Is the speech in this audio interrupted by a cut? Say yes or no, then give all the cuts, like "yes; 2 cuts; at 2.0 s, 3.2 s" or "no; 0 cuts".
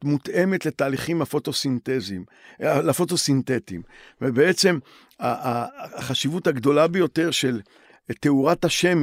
no; 0 cuts